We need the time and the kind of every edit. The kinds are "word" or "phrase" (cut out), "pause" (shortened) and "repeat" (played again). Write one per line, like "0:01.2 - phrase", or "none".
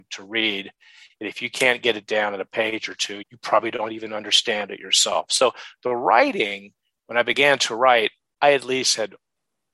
0:03.2 - word